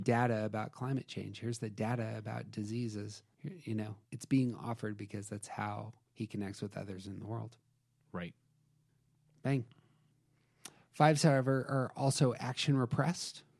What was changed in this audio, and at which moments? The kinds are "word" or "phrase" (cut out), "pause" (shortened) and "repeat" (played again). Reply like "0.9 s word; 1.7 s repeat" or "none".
4.0 s pause